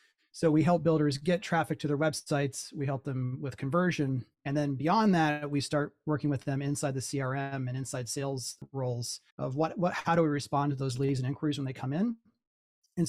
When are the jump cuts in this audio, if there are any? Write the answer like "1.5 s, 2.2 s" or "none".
9.3 s

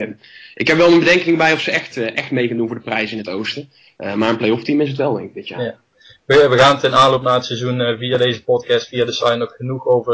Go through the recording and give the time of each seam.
none

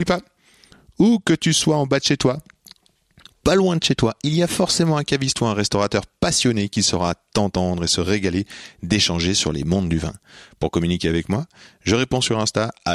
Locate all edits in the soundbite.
none

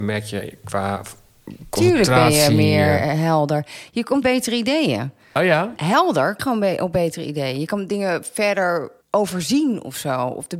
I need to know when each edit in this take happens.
4.2 s, 6.4 s, 9.0 s

